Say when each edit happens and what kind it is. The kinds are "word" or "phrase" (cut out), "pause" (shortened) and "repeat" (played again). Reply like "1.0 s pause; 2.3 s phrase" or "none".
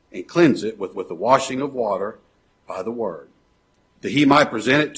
0.9 s repeat